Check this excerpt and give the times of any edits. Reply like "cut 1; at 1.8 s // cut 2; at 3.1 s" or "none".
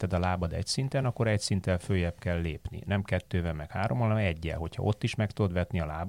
none